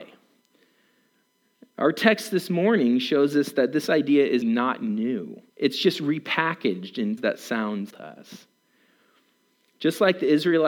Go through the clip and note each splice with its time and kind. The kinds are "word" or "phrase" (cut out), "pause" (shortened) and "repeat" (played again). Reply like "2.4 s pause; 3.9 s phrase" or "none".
4.4 s word; 5.5 s pause; 7.2 s word; 7.9 s word